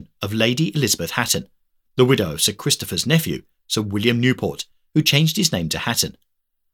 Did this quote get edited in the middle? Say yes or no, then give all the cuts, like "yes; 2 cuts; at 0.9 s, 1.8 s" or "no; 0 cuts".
no; 0 cuts